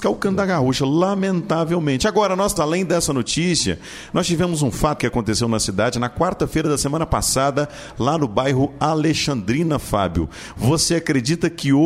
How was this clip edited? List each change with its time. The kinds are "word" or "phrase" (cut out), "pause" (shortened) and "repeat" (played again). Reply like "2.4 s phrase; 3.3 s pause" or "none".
2.6 s word; 5.0 s word